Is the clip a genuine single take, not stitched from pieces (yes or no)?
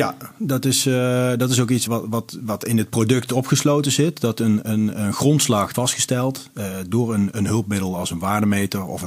no